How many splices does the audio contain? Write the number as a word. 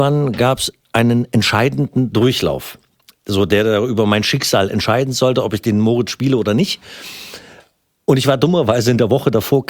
zero